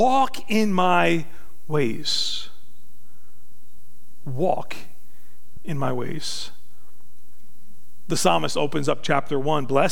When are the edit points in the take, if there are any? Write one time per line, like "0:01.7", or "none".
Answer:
none